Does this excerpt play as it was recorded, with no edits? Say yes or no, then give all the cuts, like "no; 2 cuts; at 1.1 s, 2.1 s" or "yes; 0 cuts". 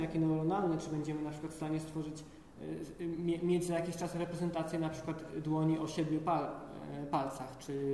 yes; 0 cuts